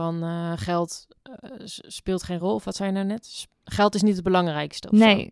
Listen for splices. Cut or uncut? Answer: uncut